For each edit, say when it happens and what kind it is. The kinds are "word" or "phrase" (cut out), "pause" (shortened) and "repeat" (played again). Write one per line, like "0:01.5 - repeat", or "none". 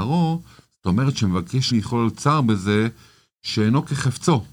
0:01.7 - phrase

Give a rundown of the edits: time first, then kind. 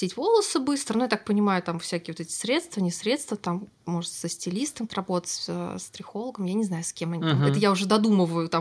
0:04.9 - word

